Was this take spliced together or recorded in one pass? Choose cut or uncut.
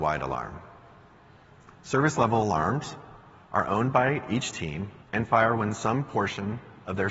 cut